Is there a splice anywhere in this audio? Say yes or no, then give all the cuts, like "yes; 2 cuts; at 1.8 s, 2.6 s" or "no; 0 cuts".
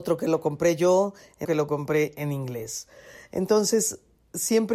yes; 1 cut; at 1.4 s